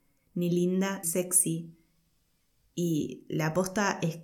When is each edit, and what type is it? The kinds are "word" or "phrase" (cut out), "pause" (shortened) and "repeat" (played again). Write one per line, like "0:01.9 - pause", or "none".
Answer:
0:01.0 - word
0:02.4 - pause